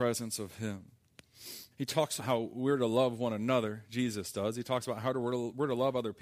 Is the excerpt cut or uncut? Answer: cut